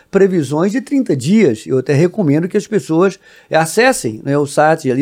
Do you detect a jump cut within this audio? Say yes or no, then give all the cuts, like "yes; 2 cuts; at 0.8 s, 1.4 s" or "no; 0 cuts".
no; 0 cuts